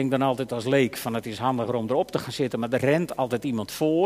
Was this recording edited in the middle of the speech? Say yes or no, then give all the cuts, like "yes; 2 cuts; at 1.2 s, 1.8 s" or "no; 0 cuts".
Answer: no; 0 cuts